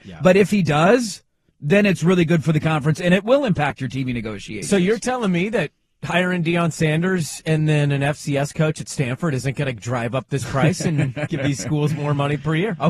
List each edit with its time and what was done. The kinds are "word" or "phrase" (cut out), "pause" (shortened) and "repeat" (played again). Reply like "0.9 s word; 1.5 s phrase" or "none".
none